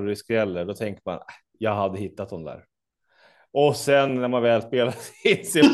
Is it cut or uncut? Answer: uncut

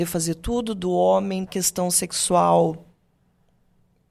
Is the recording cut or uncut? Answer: cut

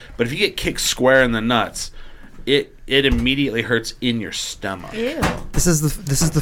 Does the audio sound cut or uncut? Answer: uncut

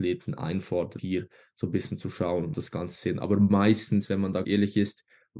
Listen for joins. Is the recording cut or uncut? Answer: cut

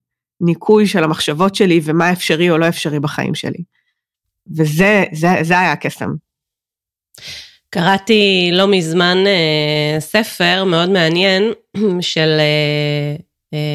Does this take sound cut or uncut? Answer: uncut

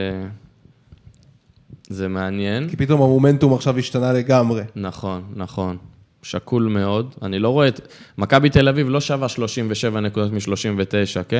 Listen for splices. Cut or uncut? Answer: uncut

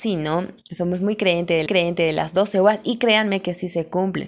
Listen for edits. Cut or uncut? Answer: cut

